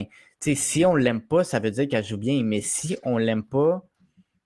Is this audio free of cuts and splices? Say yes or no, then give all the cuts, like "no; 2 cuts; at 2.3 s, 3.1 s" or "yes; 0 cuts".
yes; 0 cuts